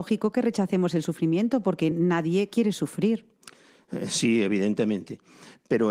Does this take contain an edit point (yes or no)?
no